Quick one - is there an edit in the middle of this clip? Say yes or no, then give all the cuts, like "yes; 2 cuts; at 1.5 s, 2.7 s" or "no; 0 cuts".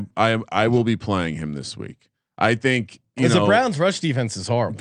no; 0 cuts